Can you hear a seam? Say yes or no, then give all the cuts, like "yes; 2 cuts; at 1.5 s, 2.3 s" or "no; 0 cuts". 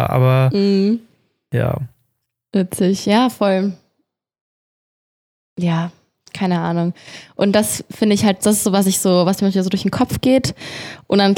no; 0 cuts